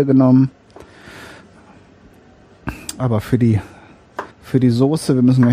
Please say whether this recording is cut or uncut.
cut